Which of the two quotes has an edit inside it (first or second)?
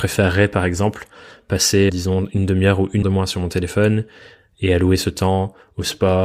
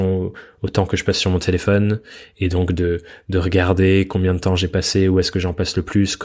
first